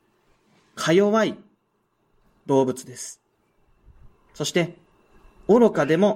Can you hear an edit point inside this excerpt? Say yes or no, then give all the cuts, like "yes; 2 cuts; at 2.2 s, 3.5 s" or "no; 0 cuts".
no; 0 cuts